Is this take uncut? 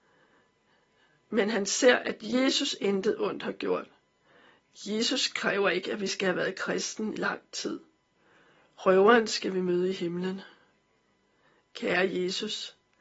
no; 1 cut; at 7.2 s

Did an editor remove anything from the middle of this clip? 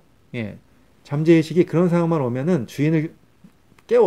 no; 0 cuts

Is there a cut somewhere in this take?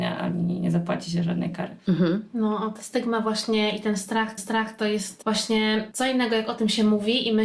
yes; 1 cut; at 4.4 s

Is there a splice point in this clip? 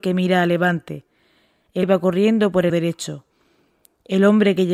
yes; 2 cuts; at 1.8 s, 2.7 s

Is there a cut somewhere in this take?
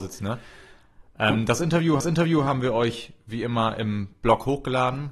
yes; 1 cut; at 2.0 s

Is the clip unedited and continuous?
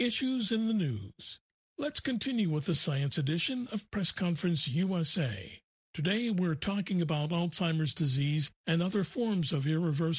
yes; 0 cuts

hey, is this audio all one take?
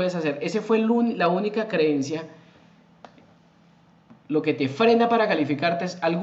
yes; 0 cuts

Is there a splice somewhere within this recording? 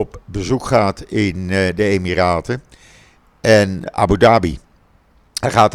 yes; 1 cut; at 3.9 s

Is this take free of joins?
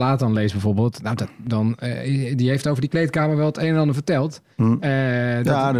no; 1 cut; at 4.5 s

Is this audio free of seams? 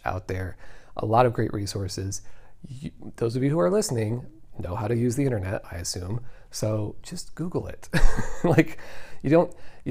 yes; 0 cuts

